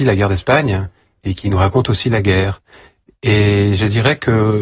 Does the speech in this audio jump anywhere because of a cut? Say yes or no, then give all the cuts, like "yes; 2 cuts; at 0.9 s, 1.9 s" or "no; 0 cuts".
no; 0 cuts